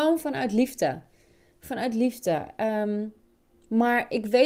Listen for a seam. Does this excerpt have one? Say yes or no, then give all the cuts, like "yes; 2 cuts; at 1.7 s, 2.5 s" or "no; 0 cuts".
no; 0 cuts